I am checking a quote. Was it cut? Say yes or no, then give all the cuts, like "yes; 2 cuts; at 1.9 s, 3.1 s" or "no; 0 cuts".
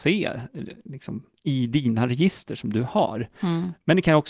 no; 0 cuts